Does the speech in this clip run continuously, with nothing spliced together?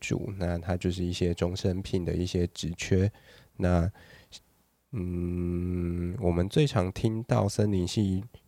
yes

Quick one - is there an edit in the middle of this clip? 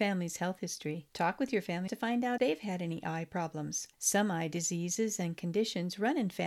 yes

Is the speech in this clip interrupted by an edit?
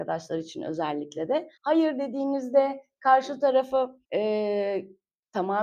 yes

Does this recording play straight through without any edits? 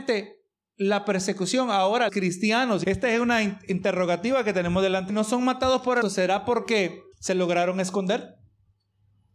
no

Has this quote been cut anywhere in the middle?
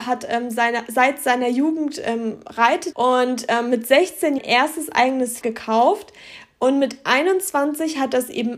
yes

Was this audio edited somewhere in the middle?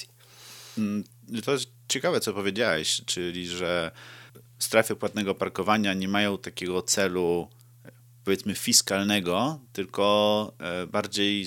no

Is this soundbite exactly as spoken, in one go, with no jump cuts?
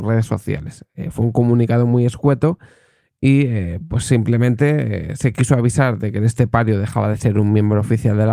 yes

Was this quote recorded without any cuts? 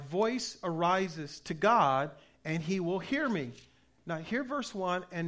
yes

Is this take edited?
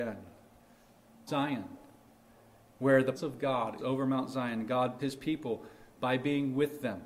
yes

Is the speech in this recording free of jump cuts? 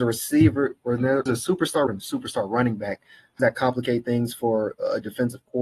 no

